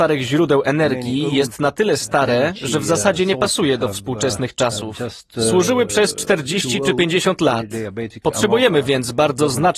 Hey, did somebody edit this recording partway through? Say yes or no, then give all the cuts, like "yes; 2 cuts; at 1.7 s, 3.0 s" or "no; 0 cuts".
no; 0 cuts